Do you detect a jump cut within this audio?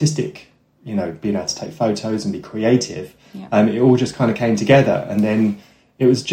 no; 0 cuts

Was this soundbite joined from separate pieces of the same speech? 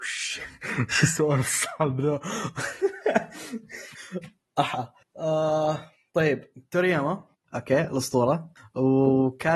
no; 0 cuts

